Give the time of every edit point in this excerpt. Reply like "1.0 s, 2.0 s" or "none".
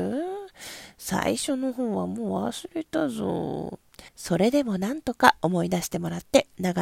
4.1 s